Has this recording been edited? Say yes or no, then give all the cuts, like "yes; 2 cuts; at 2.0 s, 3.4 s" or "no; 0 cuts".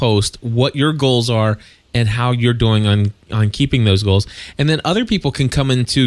no; 0 cuts